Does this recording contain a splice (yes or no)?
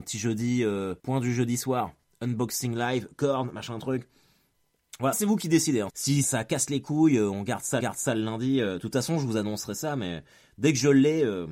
yes